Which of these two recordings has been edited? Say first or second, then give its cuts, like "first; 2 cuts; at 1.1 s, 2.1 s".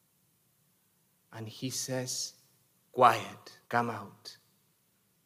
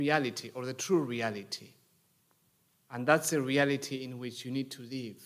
first; 1 cut; at 3.6 s